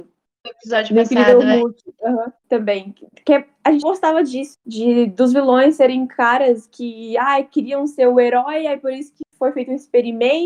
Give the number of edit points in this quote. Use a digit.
3